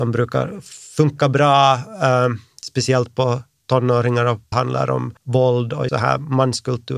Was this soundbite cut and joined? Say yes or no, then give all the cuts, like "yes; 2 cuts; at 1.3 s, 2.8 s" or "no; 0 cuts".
yes; 3 cuts; at 4.5 s, 5.2 s, 5.9 s